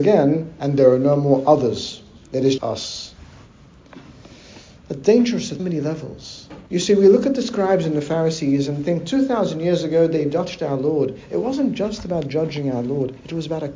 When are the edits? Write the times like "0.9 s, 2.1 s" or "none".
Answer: 2.2 s, 2.6 s, 5.6 s, 6.7 s